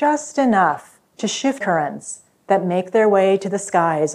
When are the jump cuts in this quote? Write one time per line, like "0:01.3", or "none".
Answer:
0:01.1
0:01.6